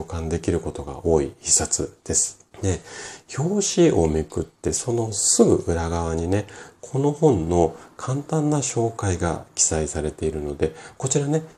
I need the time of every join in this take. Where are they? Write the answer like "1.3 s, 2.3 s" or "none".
2.5 s